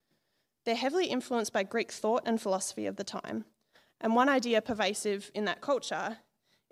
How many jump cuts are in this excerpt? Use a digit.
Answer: 0